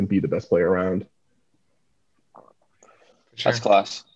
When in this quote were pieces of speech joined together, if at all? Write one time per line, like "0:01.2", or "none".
none